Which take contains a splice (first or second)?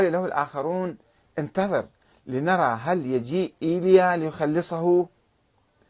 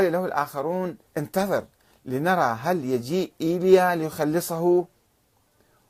second